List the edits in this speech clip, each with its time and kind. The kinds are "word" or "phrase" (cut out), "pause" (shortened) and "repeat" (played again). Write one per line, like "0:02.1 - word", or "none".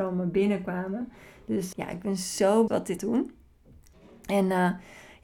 0:01.7 - word
0:02.7 - word
0:03.0 - word